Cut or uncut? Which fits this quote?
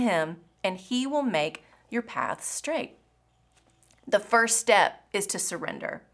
uncut